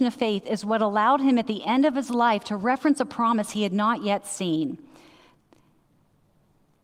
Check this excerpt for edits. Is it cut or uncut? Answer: uncut